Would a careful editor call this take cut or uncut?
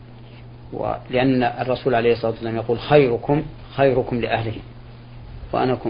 uncut